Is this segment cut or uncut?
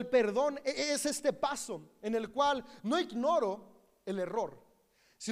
uncut